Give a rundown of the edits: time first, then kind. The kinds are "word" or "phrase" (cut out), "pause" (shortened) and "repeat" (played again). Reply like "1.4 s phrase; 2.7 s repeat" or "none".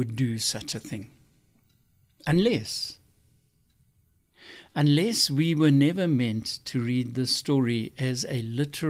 none